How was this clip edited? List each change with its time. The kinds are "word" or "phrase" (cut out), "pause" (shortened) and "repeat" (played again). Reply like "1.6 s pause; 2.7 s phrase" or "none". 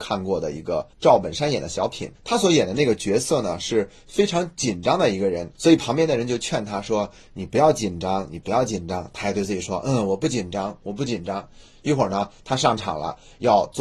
0.9 s pause; 2.1 s pause; 5.5 s pause